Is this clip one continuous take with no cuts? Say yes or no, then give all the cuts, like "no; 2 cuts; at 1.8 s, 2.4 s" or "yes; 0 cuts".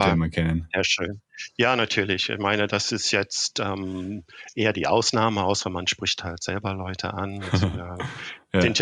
yes; 0 cuts